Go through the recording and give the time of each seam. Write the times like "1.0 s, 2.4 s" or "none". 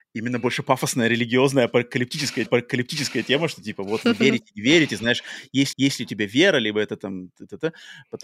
2.5 s, 5.7 s